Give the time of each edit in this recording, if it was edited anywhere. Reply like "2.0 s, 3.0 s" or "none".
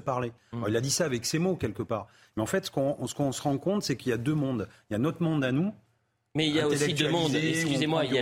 none